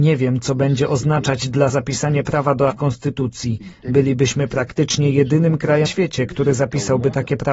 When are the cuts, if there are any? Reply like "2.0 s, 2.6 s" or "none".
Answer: 1.7 s, 2.7 s, 5.9 s

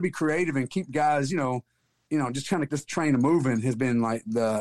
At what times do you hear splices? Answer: 2.7 s

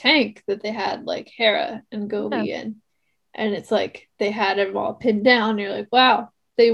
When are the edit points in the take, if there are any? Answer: none

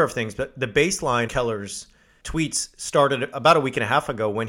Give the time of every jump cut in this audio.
1.3 s, 2.2 s, 3.3 s

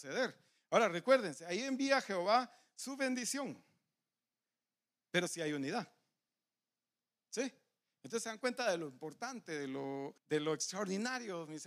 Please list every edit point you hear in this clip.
10.2 s

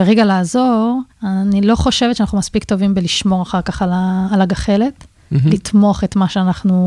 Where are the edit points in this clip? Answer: 1.1 s

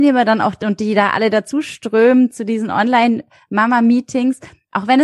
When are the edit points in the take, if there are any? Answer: none

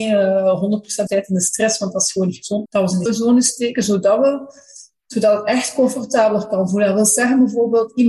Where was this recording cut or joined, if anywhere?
1.1 s, 2.7 s, 3.1 s

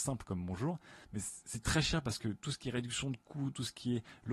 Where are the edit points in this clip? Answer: 1.0 s

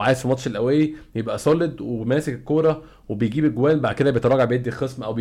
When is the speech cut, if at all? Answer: none

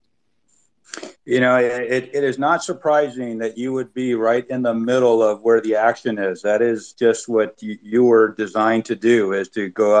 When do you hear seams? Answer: none

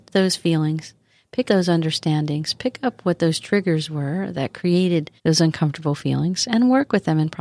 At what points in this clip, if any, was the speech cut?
1.5 s, 5.2 s

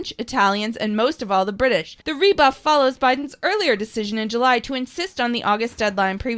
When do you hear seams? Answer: 2.0 s

